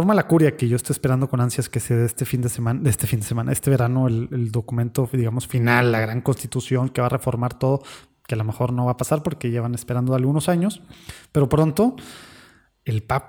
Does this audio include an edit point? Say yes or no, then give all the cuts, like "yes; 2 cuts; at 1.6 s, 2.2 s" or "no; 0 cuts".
no; 0 cuts